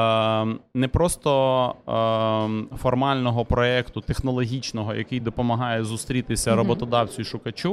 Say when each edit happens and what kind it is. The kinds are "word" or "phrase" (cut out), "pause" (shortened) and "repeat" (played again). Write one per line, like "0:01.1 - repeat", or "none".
none